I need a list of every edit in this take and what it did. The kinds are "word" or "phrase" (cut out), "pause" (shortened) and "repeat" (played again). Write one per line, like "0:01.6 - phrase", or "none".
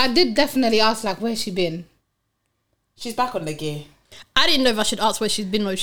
none